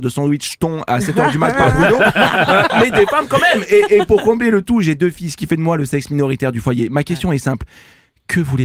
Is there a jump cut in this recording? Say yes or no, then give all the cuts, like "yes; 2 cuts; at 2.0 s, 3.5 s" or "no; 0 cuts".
no; 0 cuts